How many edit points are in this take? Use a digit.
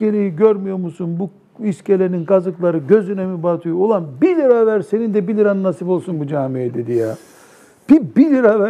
0